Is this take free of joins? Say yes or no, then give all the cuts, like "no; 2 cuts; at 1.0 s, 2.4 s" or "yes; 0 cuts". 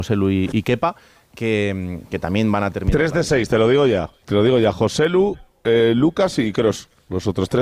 no; 1 cut; at 4.2 s